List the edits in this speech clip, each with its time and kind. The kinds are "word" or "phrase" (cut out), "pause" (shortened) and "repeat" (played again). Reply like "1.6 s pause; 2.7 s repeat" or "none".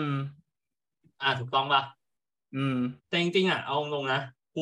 3.0 s pause